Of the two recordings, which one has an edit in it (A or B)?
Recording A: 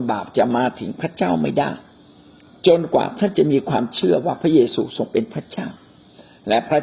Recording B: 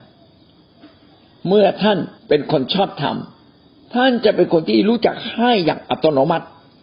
B